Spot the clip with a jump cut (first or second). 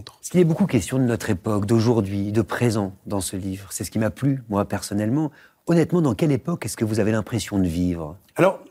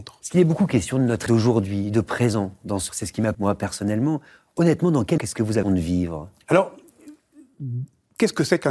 second